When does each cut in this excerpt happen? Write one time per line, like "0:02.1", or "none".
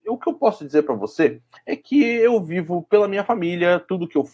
0:01.6